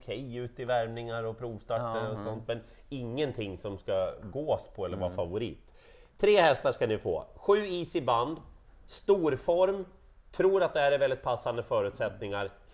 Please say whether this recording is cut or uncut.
uncut